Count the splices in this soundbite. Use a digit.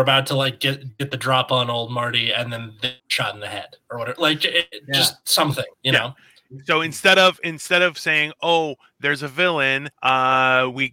3